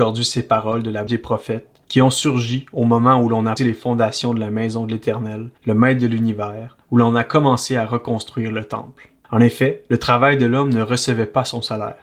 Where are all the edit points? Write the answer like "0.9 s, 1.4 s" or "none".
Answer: 1.1 s, 1.8 s, 3.6 s, 5.6 s, 6.8 s, 9.2 s, 9.9 s

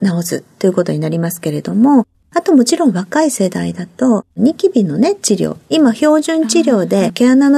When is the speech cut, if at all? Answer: 4.3 s

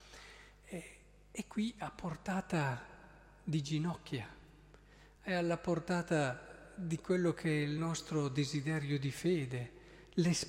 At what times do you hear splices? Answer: none

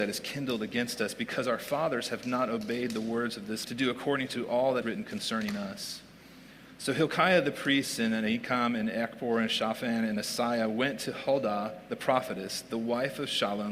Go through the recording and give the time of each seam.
3.6 s, 4.8 s

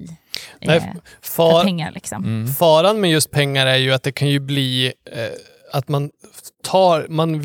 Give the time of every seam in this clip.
none

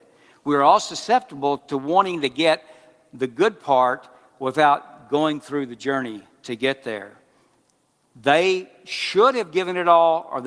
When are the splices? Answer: none

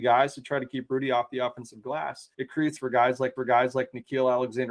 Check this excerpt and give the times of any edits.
2.3 s, 2.8 s, 3.4 s

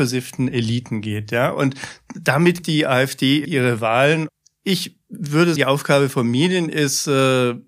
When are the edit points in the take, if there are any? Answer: 2.6 s, 3.4 s, 5.6 s

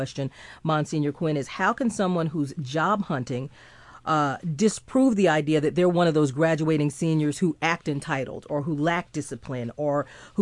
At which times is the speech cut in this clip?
none

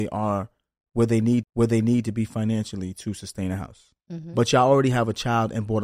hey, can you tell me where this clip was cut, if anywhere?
1.4 s, 4.0 s

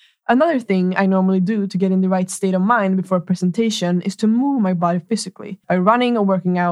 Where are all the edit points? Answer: 5.6 s

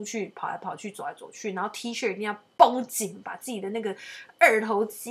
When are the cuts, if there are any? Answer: none

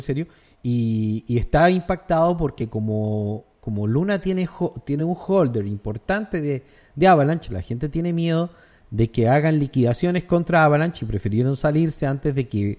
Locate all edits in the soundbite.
none

